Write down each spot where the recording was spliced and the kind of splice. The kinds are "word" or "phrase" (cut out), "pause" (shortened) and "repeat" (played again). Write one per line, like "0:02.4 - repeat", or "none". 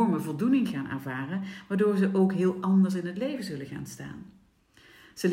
none